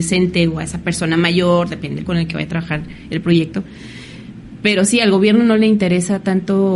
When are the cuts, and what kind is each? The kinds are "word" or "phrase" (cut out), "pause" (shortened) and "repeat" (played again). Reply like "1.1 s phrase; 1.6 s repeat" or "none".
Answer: 2.1 s word